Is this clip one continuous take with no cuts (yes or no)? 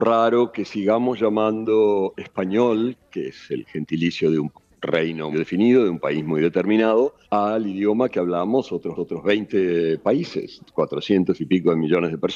no